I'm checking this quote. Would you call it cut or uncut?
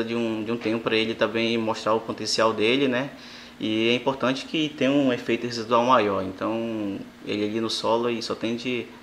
uncut